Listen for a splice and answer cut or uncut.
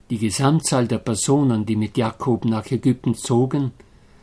uncut